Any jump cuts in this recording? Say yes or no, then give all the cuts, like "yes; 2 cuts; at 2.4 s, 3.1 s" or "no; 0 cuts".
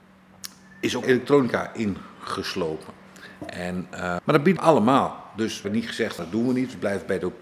yes; 5 cuts; at 1.0 s, 4.2 s, 4.6 s, 5.6 s, 6.2 s